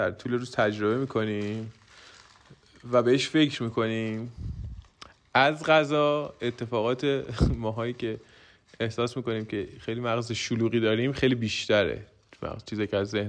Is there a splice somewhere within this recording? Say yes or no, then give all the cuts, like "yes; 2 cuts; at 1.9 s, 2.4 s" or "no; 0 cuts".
no; 0 cuts